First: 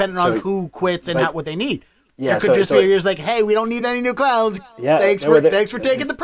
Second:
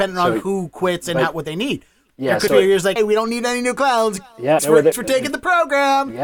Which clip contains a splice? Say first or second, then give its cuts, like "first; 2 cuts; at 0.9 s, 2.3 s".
second; 4 cuts; at 2.5 s, 3.0 s, 4.6 s, 4.9 s